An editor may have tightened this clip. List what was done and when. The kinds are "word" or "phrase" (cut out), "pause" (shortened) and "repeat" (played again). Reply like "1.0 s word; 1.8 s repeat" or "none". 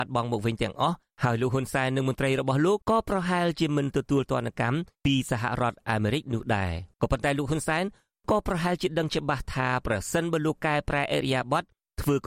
2.8 s pause; 6.9 s pause